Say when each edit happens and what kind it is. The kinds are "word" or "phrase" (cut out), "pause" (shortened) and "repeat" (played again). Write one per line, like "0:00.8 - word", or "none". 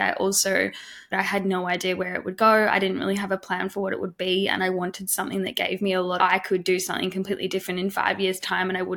0:01.1 - phrase
0:06.2 - phrase